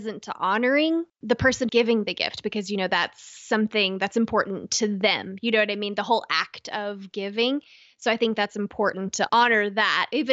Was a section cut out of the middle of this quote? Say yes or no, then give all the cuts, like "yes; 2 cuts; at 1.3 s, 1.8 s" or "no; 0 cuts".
yes; 3 cuts; at 1.1 s, 1.7 s, 9.3 s